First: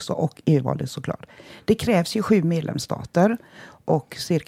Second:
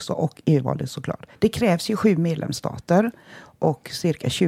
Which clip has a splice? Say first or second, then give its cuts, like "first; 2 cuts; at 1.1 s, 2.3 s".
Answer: second; 1 cut; at 1.4 s